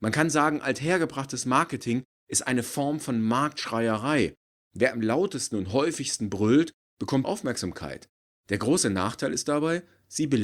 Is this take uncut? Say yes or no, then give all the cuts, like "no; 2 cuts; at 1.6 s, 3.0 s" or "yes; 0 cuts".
no; 1 cut; at 7.2 s